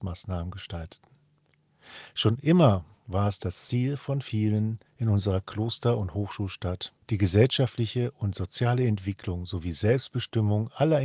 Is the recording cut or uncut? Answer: cut